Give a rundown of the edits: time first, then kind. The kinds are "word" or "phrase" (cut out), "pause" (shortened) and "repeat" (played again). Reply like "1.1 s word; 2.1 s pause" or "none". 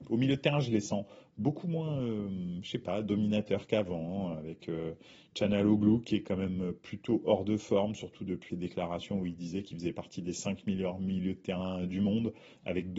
8.5 s word